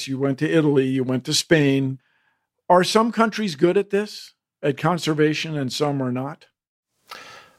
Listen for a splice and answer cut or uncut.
uncut